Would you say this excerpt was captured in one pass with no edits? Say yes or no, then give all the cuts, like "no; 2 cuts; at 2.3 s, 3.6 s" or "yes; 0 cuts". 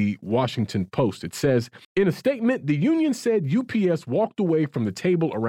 no; 1 cut; at 1.8 s